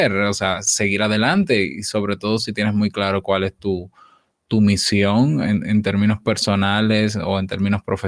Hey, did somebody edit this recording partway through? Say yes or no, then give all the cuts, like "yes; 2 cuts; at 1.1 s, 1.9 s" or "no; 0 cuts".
no; 0 cuts